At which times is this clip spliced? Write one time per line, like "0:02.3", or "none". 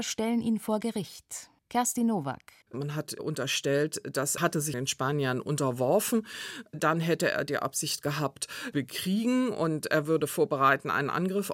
0:01.6
0:02.6
0:04.4
0:04.7
0:08.7